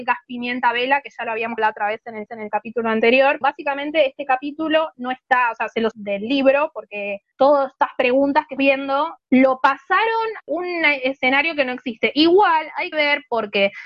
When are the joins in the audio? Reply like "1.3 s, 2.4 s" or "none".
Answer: 1.6 s, 2.3 s, 3.4 s, 5.9 s, 7.3 s, 8.6 s, 10.4 s, 12.9 s